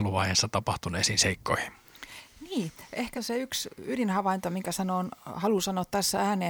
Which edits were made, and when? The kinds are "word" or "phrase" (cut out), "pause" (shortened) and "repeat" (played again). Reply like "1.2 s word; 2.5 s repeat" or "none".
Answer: 3.1 s word